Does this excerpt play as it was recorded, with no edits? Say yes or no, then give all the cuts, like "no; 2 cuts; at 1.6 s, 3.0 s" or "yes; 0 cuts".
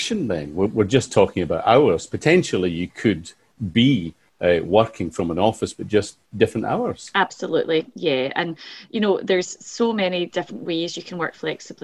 yes; 0 cuts